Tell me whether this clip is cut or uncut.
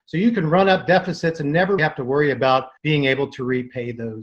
cut